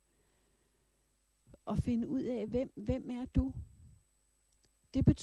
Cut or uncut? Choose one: uncut